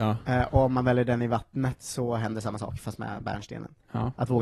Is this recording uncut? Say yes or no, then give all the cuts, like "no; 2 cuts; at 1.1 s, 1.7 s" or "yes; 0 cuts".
yes; 0 cuts